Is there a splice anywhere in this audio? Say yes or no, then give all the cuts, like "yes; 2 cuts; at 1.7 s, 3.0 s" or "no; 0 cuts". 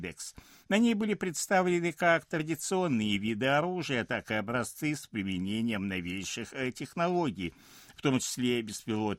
no; 0 cuts